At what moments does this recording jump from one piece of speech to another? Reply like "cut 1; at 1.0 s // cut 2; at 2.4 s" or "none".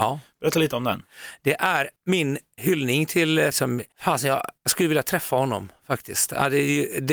cut 1; at 2.0 s // cut 2; at 3.5 s // cut 3; at 4.6 s